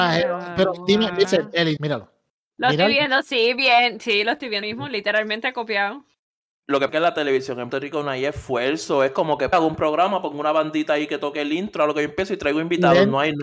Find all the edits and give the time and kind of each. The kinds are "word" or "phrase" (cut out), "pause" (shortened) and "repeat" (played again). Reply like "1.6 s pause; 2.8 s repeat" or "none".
1.2 s word; 1.8 s word; 4.6 s word; 6.9 s word; 7.7 s word; 9.5 s word

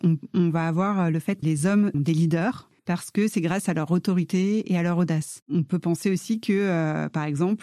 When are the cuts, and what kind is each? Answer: 1.4 s word; 1.9 s word; 2.8 s pause; 5.4 s pause

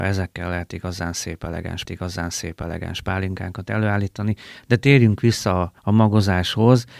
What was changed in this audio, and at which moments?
1.9 s repeat; 5.8 s pause

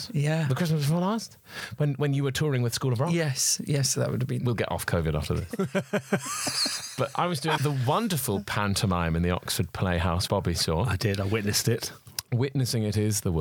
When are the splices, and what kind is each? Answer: 7.1 s word; 7.6 s word; 10.3 s word

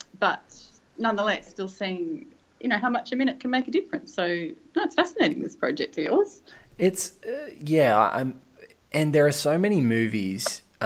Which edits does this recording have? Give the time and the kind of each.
1.5 s word

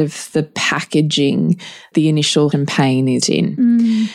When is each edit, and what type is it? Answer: 1.9 s word; 2.5 s word; 3.2 s word

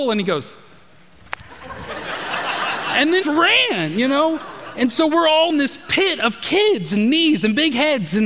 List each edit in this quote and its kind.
3.2 s phrase; 5.5 s word

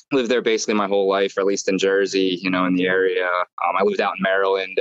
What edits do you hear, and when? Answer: none

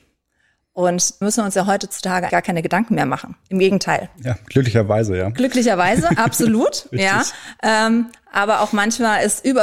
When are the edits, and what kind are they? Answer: 1.2 s word; 2.3 s word

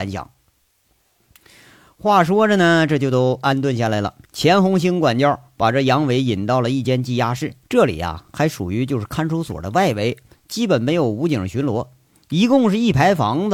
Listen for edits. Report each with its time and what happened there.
4.2 s pause; 7.6 s pause

